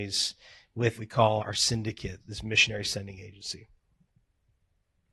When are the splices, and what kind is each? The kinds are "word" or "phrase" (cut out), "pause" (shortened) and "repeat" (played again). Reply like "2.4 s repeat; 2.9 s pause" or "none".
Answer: 1.0 s word; 1.4 s word; 2.2 s word